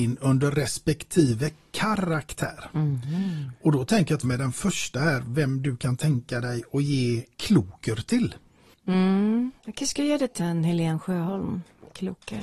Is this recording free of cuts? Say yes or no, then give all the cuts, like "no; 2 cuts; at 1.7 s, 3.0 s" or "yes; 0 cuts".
no; 3 cuts; at 4.2 s, 9.6 s, 10.4 s